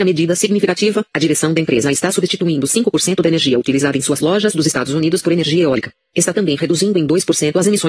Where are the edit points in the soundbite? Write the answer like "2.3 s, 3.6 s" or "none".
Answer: none